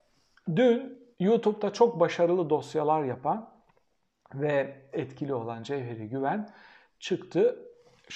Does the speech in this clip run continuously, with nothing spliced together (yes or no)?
no